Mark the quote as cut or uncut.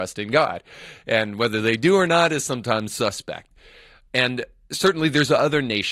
uncut